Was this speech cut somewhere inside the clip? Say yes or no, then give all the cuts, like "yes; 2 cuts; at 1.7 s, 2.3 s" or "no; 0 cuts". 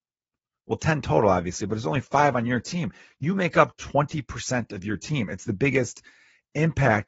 no; 0 cuts